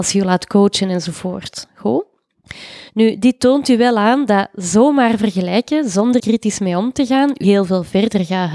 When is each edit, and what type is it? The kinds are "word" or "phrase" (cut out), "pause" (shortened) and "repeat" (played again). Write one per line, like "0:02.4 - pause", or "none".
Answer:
0:02.9 - pause
0:06.2 - word
0:07.4 - word